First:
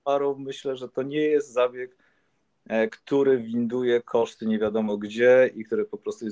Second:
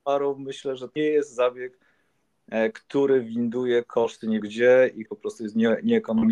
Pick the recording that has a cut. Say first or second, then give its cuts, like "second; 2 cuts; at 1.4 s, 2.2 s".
second; 3 cuts; at 1.0 s, 4.4 s, 5.1 s